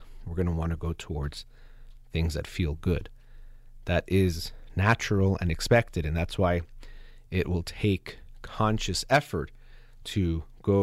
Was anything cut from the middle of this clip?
no; 0 cuts

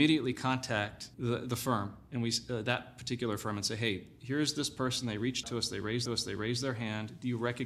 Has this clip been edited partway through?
yes; 3 cuts; at 1.1 s, 5.4 s, 6.1 s

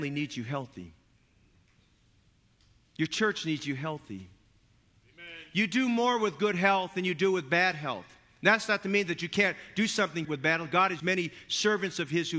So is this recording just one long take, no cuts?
no; 2 cuts; at 10.2 s, 11.0 s

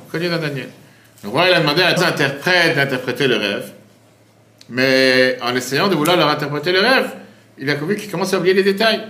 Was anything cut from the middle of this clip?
yes; 1 cut; at 2.0 s

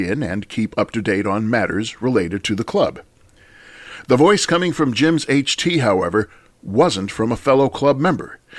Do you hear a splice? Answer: no; 0 cuts

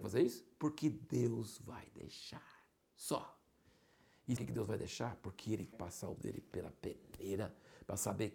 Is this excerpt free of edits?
no; 3 cuts; at 4.4 s, 5.7 s, 6.2 s

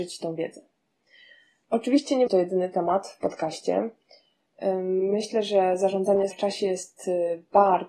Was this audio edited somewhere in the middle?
yes; 2 cuts; at 2.3 s, 6.3 s

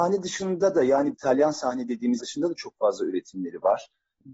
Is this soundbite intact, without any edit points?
no; 2 cuts; at 1.1 s, 2.2 s

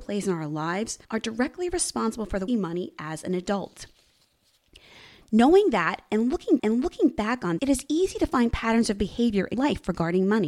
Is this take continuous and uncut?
no; 5 cuts; at 1.0 s, 2.5 s, 6.6 s, 7.6 s, 9.5 s

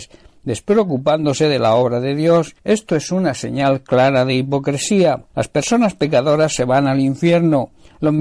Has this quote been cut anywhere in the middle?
yes; 2 cuts; at 2.6 s, 5.3 s

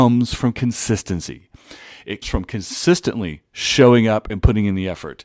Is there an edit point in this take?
yes; 1 cut; at 2.2 s

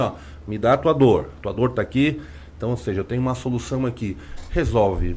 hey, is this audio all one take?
yes; 0 cuts

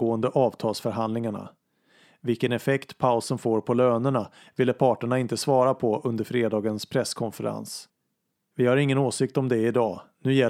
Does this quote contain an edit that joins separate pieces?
no; 0 cuts

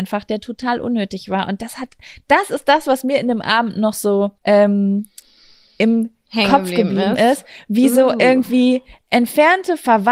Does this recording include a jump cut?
yes; 1 cut; at 4.4 s

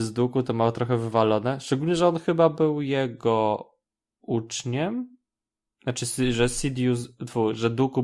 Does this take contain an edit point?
no; 0 cuts

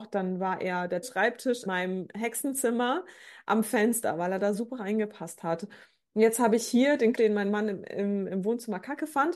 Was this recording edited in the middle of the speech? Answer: yes; 3 cuts; at 1.0 s, 1.7 s, 7.1 s

